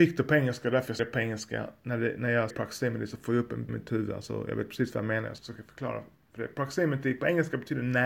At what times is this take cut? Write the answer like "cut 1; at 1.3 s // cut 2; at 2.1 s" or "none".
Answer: cut 1; at 1.0 s // cut 2; at 2.5 s // cut 3; at 3.7 s // cut 4; at 5.4 s